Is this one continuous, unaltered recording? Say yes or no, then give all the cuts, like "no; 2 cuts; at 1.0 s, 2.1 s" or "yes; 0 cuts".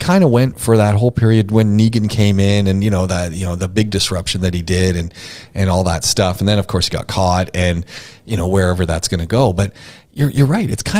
yes; 0 cuts